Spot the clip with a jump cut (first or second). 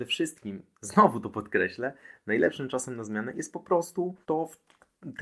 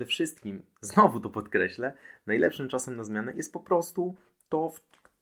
first